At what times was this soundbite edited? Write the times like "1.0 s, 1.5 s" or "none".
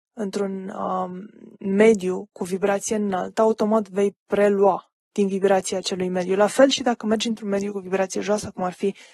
1.5 s, 5.0 s